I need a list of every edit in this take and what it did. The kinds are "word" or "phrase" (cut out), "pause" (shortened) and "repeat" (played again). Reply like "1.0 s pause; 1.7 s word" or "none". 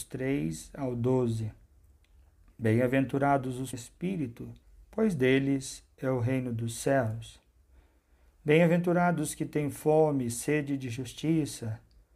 3.7 s phrase; 4.6 s pause